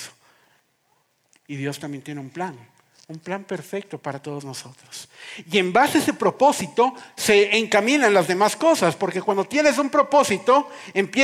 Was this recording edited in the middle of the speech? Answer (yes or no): no